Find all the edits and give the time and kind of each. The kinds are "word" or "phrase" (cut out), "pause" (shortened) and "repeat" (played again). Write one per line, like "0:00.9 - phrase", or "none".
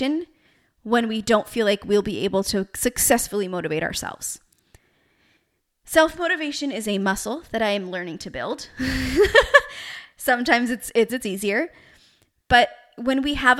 0:11.1 - phrase